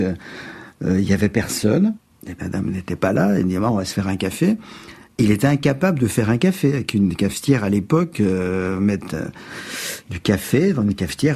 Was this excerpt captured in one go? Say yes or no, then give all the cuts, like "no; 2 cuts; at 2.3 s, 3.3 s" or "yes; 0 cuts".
yes; 0 cuts